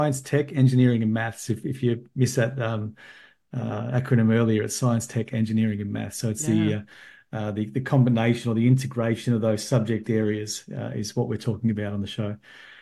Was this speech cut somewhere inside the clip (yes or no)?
no